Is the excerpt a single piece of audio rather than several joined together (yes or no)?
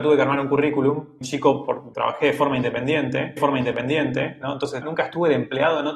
no